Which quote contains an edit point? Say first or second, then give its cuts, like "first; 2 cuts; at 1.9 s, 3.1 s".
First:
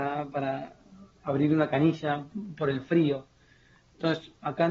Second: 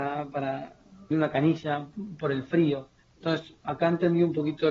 second; 2 cuts; at 1.1 s, 3.0 s